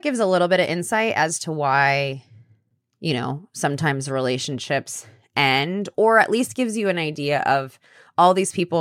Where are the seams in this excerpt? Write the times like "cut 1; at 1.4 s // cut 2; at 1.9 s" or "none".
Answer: none